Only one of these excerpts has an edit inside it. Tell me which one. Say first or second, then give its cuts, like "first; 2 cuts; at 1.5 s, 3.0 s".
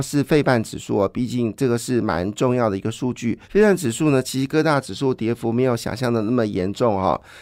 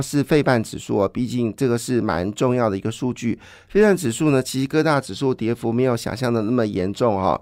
first; 1 cut; at 3.4 s